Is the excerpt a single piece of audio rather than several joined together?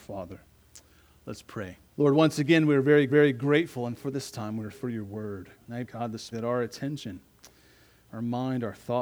no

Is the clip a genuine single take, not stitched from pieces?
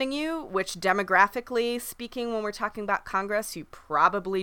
yes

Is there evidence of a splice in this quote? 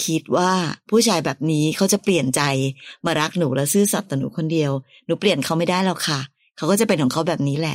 no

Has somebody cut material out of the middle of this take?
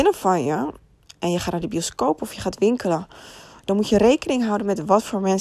no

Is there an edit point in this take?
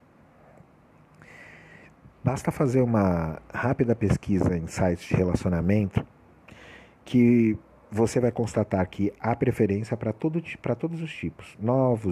no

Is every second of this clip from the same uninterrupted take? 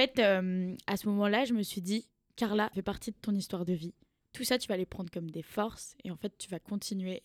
no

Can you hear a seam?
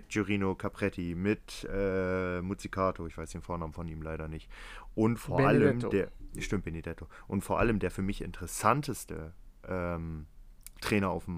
no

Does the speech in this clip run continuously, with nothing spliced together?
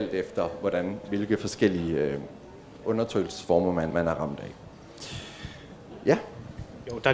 no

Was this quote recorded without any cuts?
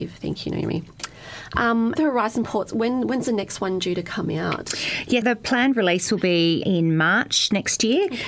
no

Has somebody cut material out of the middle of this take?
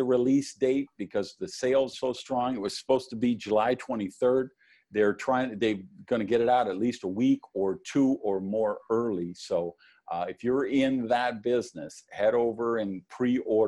yes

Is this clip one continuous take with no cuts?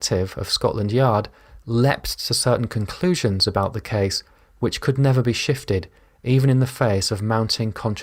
yes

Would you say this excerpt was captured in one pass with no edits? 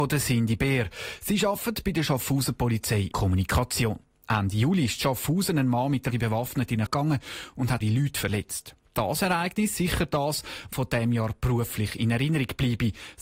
no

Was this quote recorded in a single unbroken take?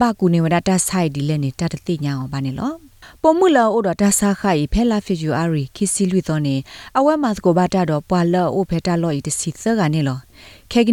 yes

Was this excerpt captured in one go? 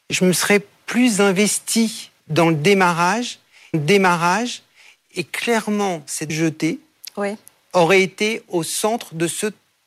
no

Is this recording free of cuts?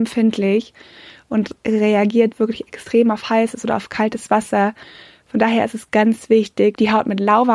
yes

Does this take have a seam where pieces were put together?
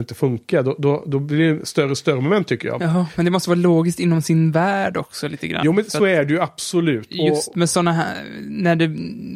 no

